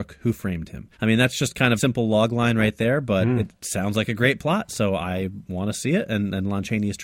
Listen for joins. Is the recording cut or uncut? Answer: cut